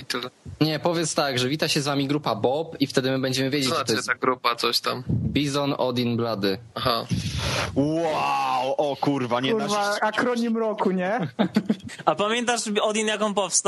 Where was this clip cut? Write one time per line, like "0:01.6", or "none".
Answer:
0:06.7

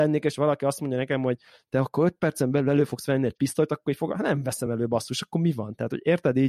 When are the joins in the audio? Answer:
none

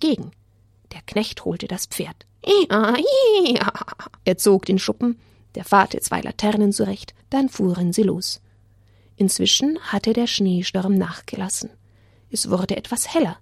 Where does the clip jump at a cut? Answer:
0:04.2
0:04.8
0:05.9
0:07.2

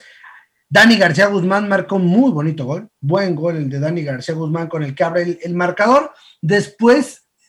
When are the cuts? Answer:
none

